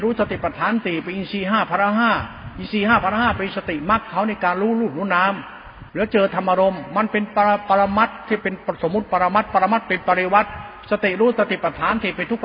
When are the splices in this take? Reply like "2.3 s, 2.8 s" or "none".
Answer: 5.9 s